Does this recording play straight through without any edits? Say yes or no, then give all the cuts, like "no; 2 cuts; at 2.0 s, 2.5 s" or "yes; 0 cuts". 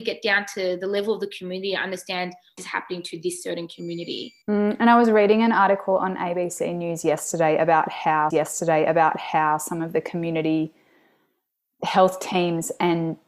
no; 3 cuts; at 2.6 s, 4.4 s, 8.3 s